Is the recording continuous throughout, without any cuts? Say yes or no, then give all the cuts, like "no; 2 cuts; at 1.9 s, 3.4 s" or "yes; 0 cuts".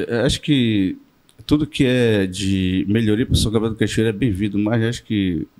yes; 0 cuts